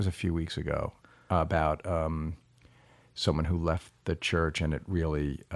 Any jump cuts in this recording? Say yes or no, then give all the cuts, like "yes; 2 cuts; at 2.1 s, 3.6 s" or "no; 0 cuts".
no; 0 cuts